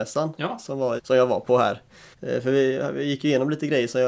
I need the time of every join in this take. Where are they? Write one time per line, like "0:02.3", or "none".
0:01.0
0:02.1